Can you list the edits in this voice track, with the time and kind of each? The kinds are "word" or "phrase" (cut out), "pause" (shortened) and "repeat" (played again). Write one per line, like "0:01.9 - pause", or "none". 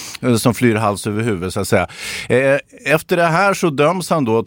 none